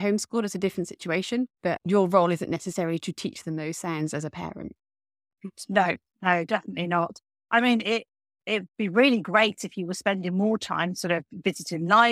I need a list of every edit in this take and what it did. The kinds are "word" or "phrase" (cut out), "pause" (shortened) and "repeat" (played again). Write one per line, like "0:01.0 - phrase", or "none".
0:01.5 - pause